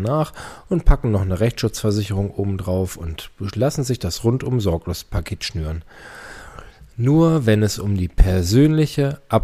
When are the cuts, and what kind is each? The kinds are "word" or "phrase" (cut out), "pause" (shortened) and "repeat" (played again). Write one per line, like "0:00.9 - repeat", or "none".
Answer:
none

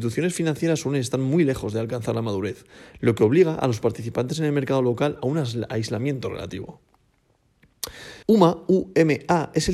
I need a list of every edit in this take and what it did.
0:08.2 - pause

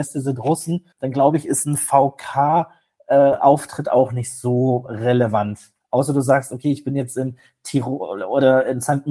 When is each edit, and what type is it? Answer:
0:00.9 - pause

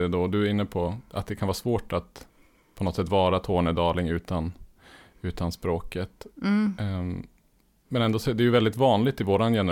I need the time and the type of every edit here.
none

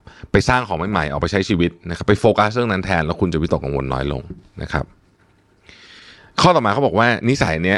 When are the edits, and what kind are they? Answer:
none

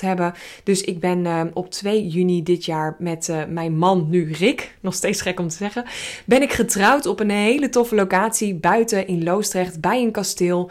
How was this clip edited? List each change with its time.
none

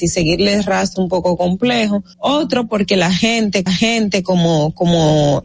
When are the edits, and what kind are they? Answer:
0:01.0 - word
0:02.1 - pause
0:03.7 - repeat

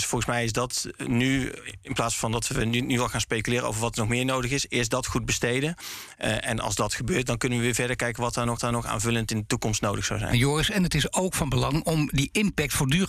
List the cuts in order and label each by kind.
0:08.6 - repeat

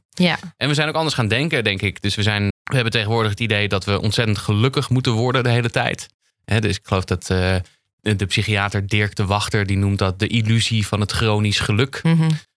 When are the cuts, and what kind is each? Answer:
0:02.5 - word

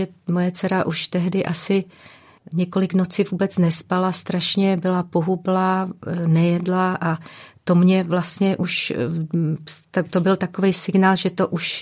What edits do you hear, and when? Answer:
none

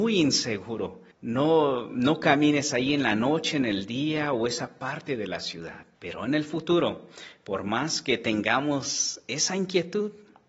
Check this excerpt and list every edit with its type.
0:01.1 - pause
0:05.9 - pause

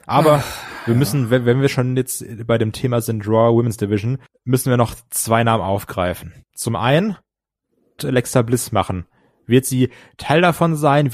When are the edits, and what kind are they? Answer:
0:04.3 - pause
0:06.4 - pause
0:08.0 - phrase

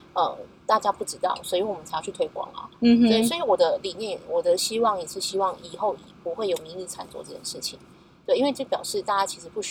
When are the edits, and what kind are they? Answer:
none

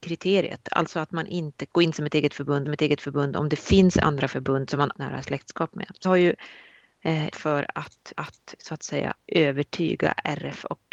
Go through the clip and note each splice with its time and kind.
0:01.7 - word
0:02.7 - repeat
0:04.9 - phrase
0:06.0 - word
0:07.3 - word
0:08.1 - repeat
0:09.2 - pause

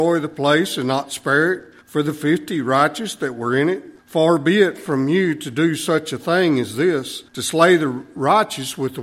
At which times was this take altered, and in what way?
0:01.8 - pause
0:04.0 - pause
0:07.3 - pause

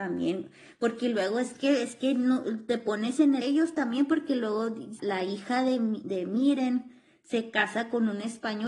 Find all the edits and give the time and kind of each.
0:03.4 - phrase
0:05.0 - word

